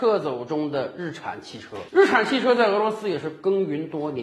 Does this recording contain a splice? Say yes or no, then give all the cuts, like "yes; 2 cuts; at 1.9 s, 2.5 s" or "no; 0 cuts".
yes; 1 cut; at 1.9 s